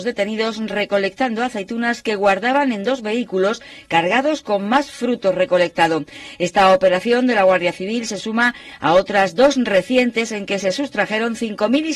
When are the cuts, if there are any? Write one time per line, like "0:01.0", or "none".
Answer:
none